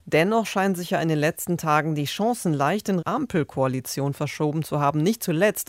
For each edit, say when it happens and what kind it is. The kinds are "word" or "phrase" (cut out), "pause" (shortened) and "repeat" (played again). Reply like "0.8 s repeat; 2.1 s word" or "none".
3.0 s word